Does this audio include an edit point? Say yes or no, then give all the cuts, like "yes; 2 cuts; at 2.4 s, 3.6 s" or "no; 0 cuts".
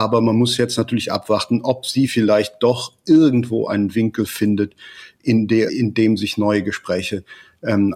yes; 1 cut; at 5.7 s